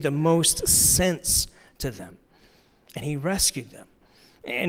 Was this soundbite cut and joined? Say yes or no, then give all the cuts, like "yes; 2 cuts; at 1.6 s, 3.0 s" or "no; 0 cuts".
no; 0 cuts